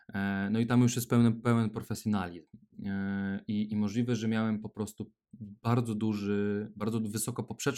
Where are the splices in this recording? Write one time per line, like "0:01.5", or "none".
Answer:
none